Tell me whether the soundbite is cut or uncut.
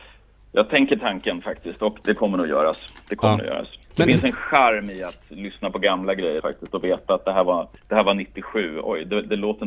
cut